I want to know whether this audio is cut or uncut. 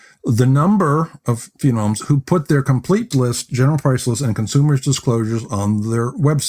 cut